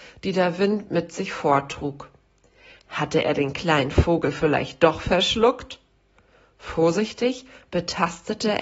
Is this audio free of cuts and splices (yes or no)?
yes